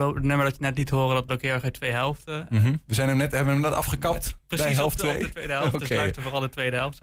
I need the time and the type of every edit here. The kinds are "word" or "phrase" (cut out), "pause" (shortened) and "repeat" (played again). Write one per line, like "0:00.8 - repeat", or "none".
0:01.3 - word
0:02.8 - pause